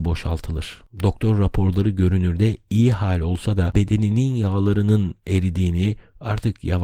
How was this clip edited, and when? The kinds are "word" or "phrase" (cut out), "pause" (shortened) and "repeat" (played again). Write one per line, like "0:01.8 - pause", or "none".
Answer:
0:03.7 - word